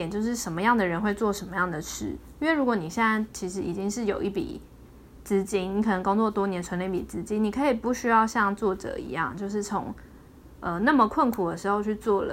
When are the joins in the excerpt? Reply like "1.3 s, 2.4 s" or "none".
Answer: none